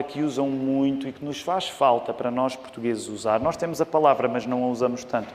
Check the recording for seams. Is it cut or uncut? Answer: uncut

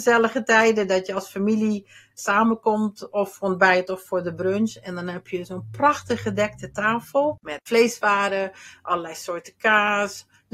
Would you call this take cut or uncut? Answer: uncut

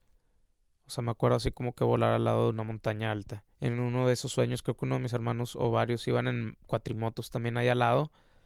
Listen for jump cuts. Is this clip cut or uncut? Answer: cut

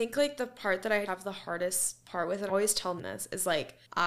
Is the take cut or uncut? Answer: cut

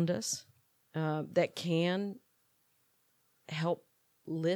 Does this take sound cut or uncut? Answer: uncut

